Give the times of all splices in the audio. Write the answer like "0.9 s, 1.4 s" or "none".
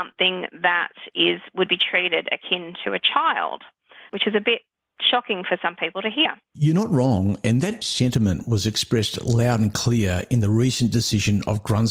4.1 s, 6.4 s, 7.8 s